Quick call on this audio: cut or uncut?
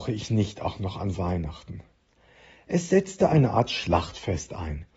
uncut